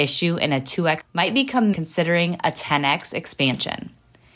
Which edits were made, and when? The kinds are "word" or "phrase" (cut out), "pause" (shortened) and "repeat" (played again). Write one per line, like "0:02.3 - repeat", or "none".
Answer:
0:01.0 - word
0:01.7 - phrase